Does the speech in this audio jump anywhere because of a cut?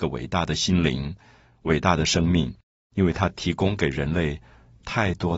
no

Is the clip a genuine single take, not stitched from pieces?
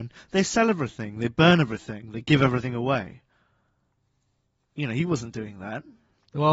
yes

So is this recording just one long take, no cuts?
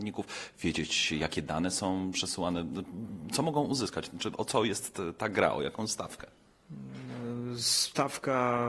yes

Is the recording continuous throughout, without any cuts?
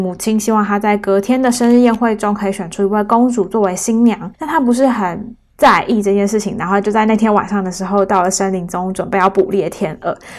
no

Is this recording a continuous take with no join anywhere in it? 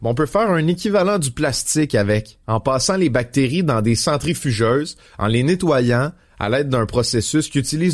no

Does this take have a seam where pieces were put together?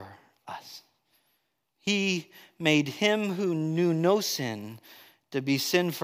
no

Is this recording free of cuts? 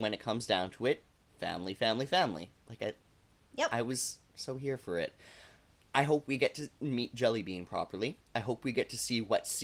yes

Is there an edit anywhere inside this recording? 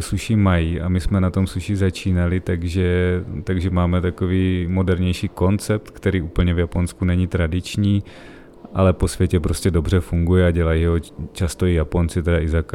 no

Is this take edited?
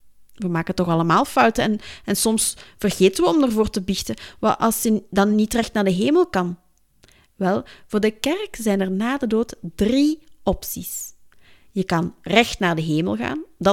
no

